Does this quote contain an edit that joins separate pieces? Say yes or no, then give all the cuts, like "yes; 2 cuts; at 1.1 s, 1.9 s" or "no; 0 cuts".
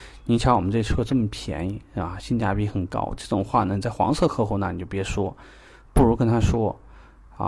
no; 0 cuts